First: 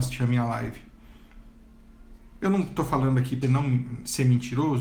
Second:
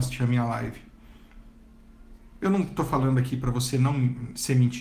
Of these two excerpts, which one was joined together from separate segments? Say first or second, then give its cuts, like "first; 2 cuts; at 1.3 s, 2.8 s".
first; 1 cut; at 3.4 s